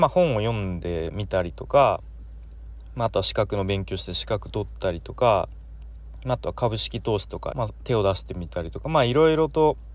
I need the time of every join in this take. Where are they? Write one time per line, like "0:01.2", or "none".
0:07.5